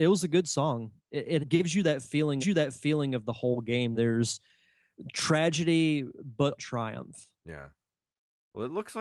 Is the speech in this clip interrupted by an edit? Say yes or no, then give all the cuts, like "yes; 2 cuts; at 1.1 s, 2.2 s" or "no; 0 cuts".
yes; 6 cuts; at 1.0 s, 1.4 s, 2.4 s, 3.9 s, 6.6 s, 7.3 s